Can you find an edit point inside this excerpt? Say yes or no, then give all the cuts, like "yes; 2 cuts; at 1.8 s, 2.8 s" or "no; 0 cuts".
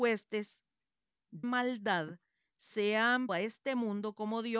yes; 2 cuts; at 1.4 s, 3.3 s